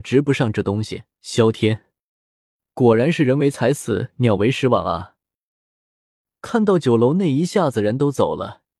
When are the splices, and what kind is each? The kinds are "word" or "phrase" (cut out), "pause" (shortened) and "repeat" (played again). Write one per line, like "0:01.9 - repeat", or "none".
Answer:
0:01.1 - pause